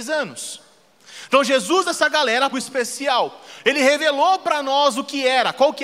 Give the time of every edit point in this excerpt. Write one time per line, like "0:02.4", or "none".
0:01.8
0:02.5